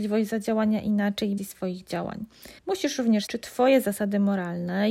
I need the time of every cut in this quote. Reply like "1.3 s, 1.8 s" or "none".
1.4 s, 2.6 s, 3.3 s